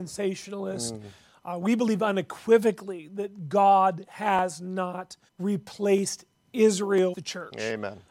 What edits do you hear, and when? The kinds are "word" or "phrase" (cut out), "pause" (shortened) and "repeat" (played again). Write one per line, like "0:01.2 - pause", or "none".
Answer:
0:05.3 - pause
0:07.1 - word